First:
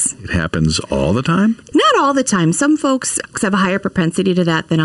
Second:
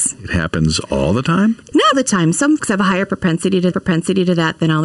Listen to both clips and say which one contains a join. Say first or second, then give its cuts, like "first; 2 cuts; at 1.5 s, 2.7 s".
second; 3 cuts; at 1.9 s, 2.6 s, 3.7 s